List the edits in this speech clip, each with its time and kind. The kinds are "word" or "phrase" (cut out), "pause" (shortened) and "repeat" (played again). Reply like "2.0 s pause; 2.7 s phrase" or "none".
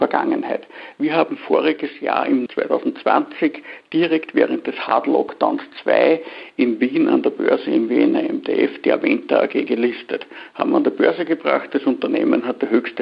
2.5 s word